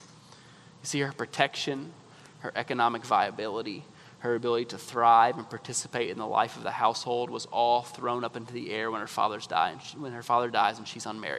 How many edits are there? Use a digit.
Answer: 0